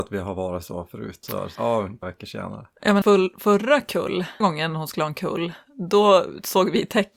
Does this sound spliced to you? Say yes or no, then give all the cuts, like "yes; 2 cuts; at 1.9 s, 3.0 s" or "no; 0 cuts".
yes; 5 cuts; at 1.2 s, 1.6 s, 2.0 s, 3.0 s, 4.4 s